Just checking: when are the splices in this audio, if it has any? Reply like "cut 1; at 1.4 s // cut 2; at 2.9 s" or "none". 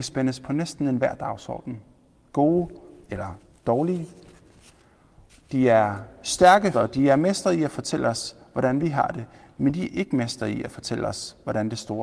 cut 1; at 6.7 s